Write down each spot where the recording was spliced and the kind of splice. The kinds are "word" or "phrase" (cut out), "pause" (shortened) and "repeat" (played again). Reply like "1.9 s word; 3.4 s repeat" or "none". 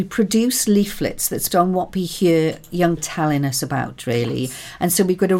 1.5 s word; 3.0 s word

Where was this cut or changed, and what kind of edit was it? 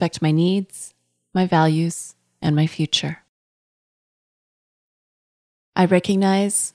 none

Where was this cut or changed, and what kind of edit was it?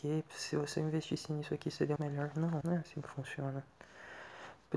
2.0 s word; 2.6 s word

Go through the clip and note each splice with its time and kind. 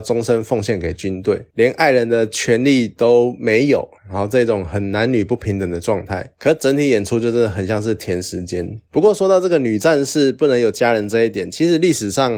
none

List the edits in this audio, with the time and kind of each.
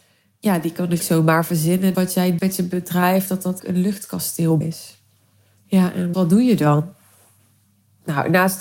1.0 s word; 1.9 s word; 2.4 s word; 3.6 s word; 4.6 s word; 6.1 s word

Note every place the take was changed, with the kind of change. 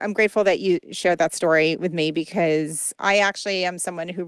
2.9 s word

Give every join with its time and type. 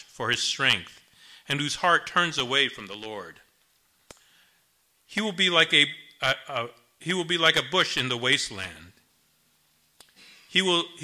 none

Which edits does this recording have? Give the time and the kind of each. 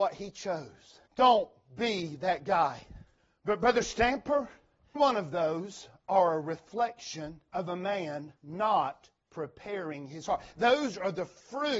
1.1 s pause; 3.2 s pause; 5.0 s word; 7.5 s pause; 8.4 s pause

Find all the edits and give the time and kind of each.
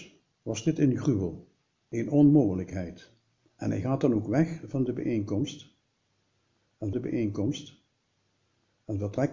3.4 s pause; 6.9 s repeat

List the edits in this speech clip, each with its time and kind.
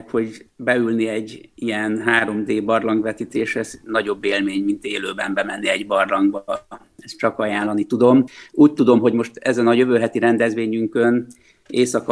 none

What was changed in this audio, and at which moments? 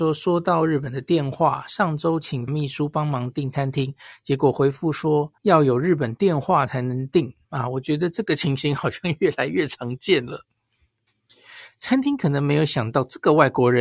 2.5 s word; 5.4 s pause

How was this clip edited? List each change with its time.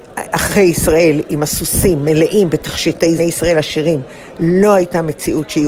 3.2 s phrase

